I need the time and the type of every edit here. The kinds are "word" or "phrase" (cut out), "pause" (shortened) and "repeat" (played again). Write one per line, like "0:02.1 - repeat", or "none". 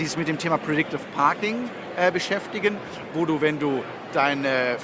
none